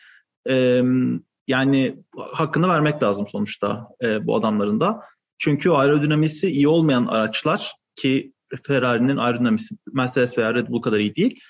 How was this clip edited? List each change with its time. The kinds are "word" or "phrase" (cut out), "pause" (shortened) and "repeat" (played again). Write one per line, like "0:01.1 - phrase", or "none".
none

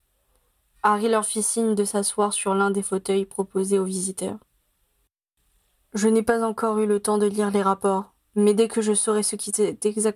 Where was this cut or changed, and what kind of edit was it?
none

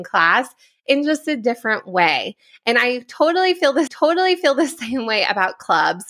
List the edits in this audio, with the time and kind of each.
0:03.9 - repeat

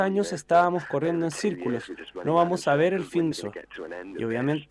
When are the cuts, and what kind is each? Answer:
0:03.3 - word

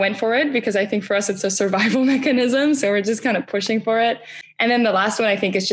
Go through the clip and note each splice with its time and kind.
none

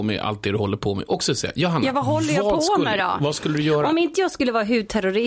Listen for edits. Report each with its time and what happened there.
none

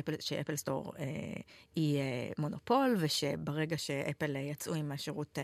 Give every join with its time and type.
none

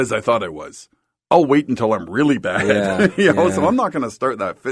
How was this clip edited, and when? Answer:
none

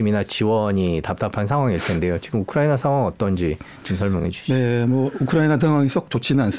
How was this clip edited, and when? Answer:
0:05.6 - word

